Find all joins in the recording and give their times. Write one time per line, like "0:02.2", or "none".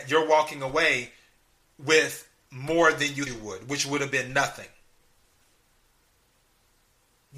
0:03.3

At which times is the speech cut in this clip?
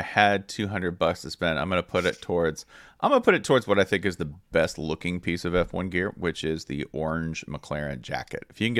none

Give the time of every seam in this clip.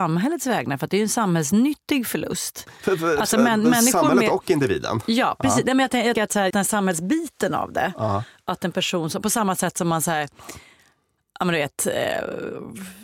0:06.2
0:06.5

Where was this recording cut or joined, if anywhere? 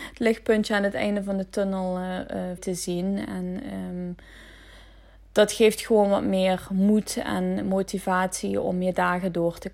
0:02.6

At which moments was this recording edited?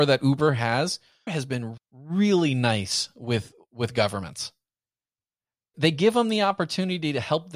0:01.3
0:01.8
0:05.7

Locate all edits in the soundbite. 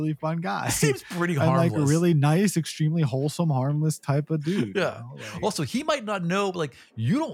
none

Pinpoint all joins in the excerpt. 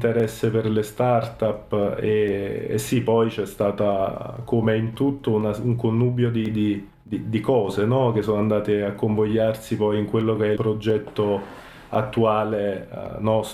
0:06.9
0:10.5

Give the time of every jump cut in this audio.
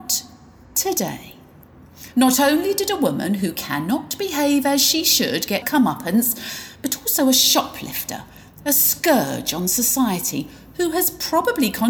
0:05.6

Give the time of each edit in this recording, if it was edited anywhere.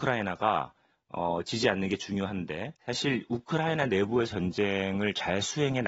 0:02.8
0:04.3

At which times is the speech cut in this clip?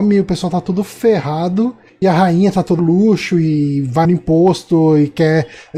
0:02.0
0:02.8
0:04.0

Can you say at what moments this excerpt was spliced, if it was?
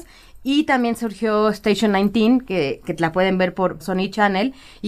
none

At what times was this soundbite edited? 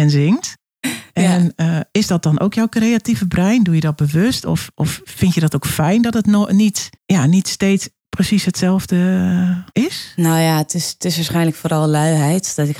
0:06.9
0:08.0
0:09.7

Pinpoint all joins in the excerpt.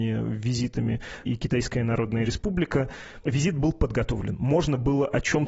0:01.2

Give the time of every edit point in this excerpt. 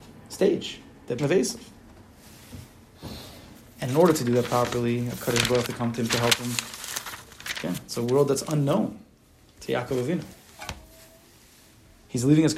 0:01.2
0:05.7

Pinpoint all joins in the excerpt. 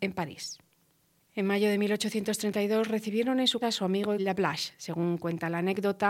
0:03.6
0:04.2

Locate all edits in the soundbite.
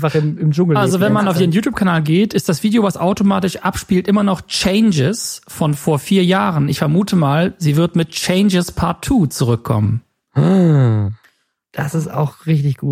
none

